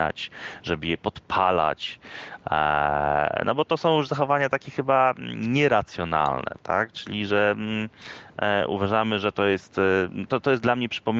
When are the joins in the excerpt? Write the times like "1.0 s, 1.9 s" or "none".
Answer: 10.3 s